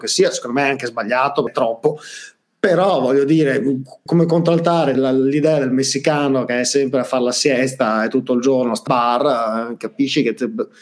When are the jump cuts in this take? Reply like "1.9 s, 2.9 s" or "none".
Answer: 1.5 s, 4.1 s, 4.9 s, 8.9 s